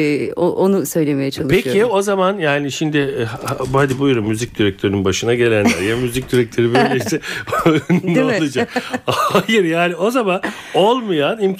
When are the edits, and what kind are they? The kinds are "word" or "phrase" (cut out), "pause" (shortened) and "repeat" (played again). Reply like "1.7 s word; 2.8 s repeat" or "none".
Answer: none